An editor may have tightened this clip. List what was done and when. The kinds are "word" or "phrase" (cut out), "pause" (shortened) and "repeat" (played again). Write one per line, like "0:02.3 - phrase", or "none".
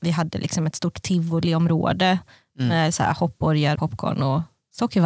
0:03.8 - word

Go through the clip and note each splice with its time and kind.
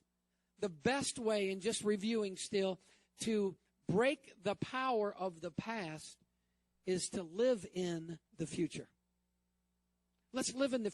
0:08.3 - pause

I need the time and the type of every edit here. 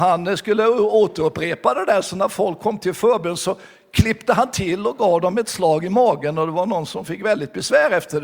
none

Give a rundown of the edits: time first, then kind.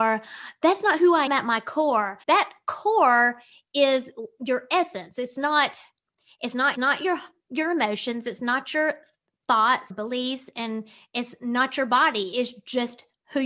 0:01.3 - word
0:02.2 - pause
0:06.8 - repeat
0:09.9 - word

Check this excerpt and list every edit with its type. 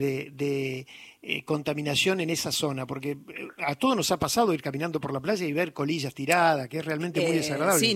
none

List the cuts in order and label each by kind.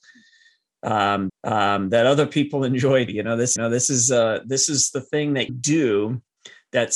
0:01.3 - repeat
0:03.1 - word
0:03.6 - repeat
0:05.5 - word

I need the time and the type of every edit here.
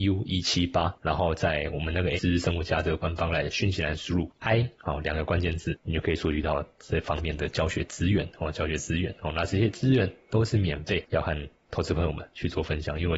0:02.2 - word
0:04.3 - word

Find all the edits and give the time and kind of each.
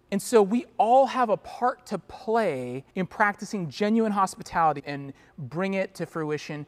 0:02.9 - pause
0:04.8 - word

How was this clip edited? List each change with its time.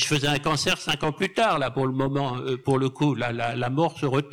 none

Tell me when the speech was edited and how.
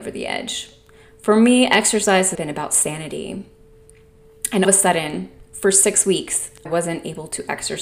0:02.3 - word
0:04.6 - phrase
0:06.7 - word

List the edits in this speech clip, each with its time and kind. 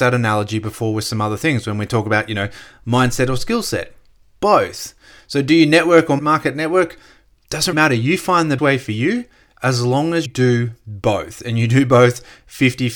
0:06.2 - word
0:07.7 - word
0:08.6 - word
0:10.3 - word

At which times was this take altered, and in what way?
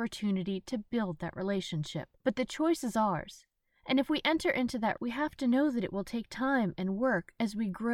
0:02.2 - pause
0:05.0 - word

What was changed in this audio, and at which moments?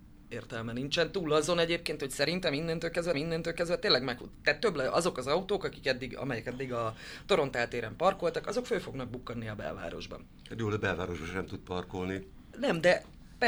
0:03.1 - repeat

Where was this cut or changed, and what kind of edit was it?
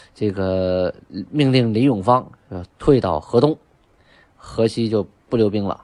none

